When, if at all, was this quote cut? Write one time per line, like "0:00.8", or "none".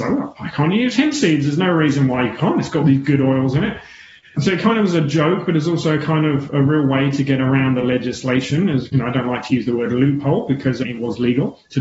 none